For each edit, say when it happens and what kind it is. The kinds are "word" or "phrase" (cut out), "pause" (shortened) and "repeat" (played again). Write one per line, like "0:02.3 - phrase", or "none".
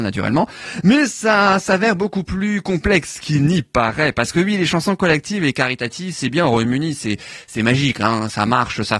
none